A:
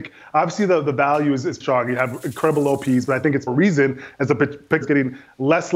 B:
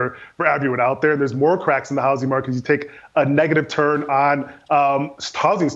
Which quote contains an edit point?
A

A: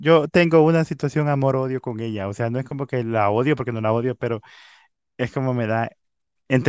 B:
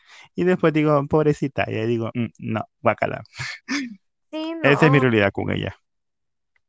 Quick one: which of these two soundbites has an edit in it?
B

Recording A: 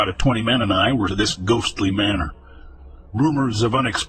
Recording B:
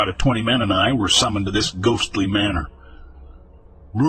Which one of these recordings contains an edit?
A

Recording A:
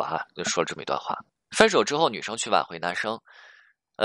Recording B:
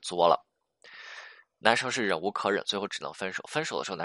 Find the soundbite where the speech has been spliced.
A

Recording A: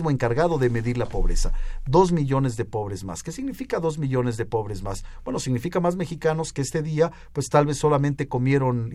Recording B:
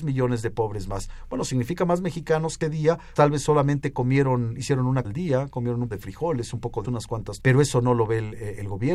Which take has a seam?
B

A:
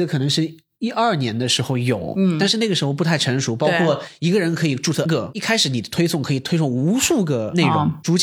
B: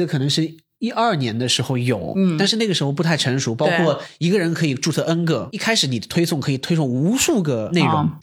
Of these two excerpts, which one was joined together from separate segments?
A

